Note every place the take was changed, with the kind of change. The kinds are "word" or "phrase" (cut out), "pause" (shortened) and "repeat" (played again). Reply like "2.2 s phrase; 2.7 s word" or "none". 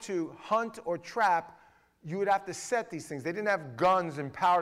none